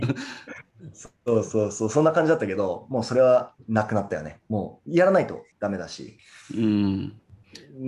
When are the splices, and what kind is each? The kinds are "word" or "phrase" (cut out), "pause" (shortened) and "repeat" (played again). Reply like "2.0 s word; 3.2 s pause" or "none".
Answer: none